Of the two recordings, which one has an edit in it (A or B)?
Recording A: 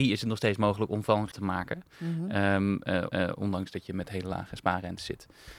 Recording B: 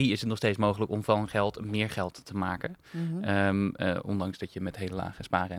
A